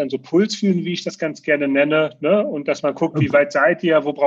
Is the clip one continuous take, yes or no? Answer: yes